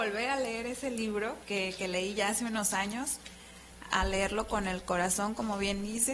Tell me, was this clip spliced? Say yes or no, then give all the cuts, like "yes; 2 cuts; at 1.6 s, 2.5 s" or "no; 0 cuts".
yes; 2 cuts; at 1.4 s, 3.8 s